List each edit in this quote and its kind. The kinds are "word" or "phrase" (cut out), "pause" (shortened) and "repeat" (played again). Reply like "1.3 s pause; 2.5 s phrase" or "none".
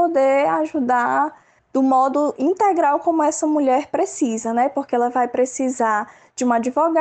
1.6 s pause